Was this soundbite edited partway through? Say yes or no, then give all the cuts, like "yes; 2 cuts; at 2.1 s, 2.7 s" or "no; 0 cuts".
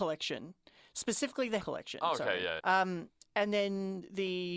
yes; 2 cuts; at 1.6 s, 2.6 s